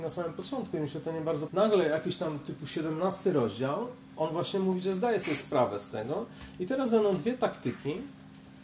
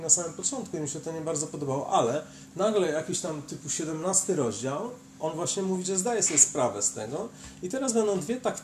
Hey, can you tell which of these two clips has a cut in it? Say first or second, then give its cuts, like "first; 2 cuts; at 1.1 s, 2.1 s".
first; 1 cut; at 1.5 s